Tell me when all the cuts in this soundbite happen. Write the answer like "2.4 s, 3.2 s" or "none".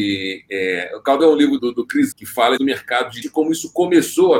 1.2 s, 1.6 s, 2.1 s, 2.6 s, 3.2 s